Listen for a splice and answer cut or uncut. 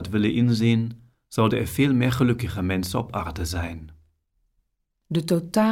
uncut